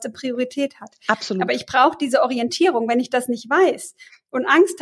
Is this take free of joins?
yes; 0 cuts

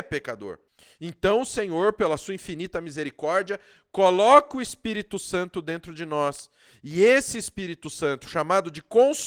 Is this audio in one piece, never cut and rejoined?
yes; 0 cuts

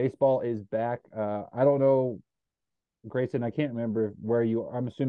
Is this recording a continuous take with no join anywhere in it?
yes; 0 cuts

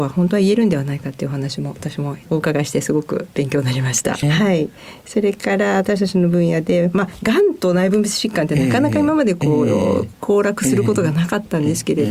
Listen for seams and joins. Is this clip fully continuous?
no; 1 cut; at 4.2 s

